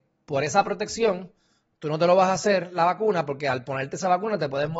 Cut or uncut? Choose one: uncut